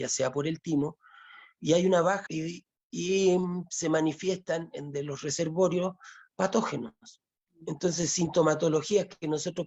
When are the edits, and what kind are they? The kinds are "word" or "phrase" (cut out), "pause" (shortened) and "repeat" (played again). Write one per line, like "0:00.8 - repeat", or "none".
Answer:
0:02.3 - phrase